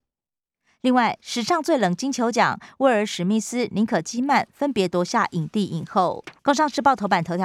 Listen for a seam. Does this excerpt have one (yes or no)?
yes